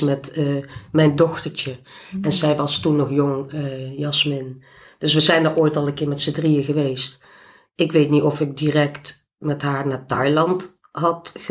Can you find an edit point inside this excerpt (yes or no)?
no